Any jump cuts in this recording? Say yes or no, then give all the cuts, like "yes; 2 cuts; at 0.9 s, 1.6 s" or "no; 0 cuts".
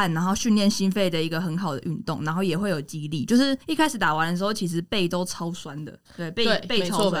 yes; 2 cuts; at 3.6 s, 6.0 s